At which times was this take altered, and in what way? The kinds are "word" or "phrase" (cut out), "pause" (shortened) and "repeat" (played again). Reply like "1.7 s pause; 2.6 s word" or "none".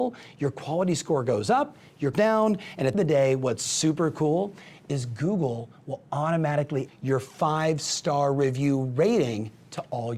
2.1 s phrase; 2.9 s phrase; 6.9 s word